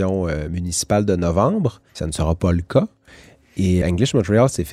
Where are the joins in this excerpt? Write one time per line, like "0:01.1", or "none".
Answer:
0:01.9
0:03.8